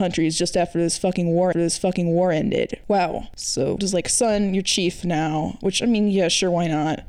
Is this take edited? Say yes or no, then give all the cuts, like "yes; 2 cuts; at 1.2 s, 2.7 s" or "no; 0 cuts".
yes; 2 cuts; at 1.5 s, 3.8 s